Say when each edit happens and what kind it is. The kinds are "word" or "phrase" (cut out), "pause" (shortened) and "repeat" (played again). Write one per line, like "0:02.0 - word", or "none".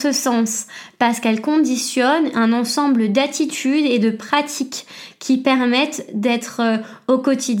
none